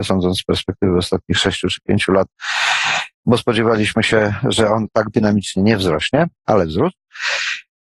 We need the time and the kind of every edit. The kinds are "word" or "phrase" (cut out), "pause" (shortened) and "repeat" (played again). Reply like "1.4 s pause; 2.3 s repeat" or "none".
3.1 s pause